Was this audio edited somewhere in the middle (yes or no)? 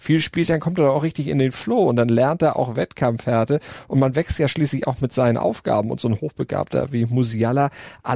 no